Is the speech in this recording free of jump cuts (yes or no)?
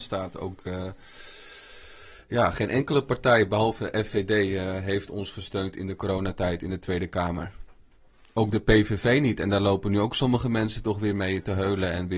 yes